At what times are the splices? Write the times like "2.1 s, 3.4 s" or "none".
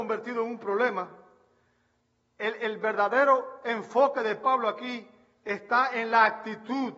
none